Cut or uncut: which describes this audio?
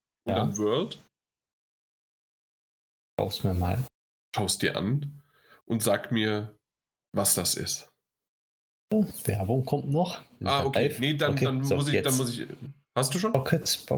uncut